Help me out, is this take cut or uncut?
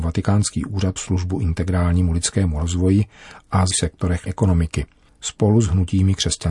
cut